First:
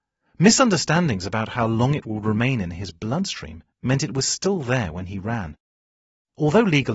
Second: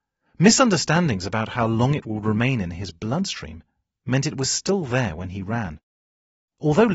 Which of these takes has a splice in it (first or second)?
first